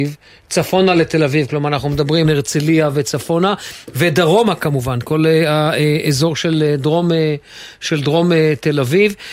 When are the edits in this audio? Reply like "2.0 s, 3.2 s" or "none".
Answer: 2.2 s